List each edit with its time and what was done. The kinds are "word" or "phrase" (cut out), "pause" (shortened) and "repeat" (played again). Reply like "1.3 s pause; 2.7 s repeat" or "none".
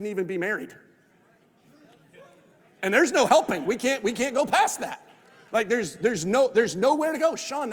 none